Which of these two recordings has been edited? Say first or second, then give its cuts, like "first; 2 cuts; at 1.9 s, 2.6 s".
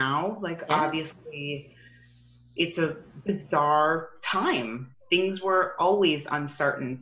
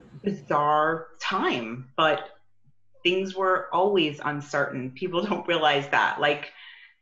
first; 1 cut; at 4.9 s